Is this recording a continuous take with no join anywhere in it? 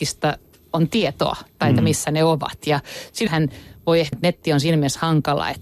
no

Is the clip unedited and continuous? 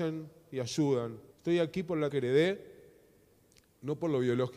no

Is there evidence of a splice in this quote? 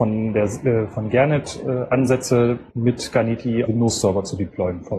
yes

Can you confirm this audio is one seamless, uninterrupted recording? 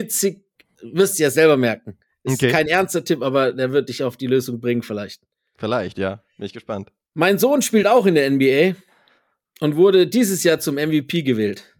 yes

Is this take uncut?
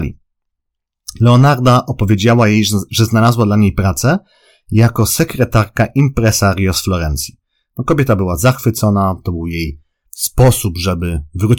yes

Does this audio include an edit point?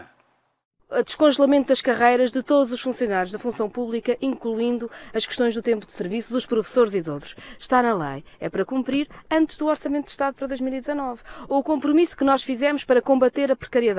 no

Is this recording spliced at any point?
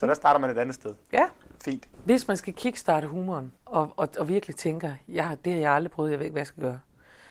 yes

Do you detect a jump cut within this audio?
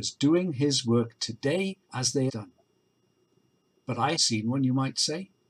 yes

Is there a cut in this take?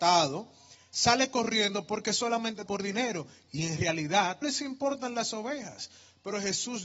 yes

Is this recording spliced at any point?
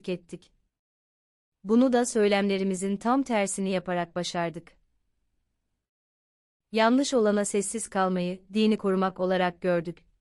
no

